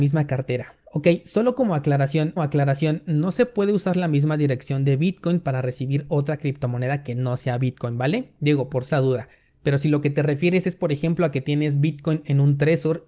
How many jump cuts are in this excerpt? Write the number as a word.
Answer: two